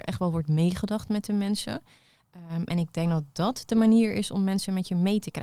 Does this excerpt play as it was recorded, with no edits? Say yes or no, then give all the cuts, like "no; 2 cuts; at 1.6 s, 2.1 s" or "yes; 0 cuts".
yes; 0 cuts